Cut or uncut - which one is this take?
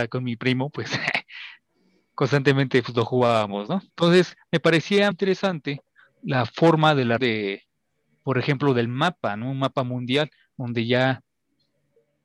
cut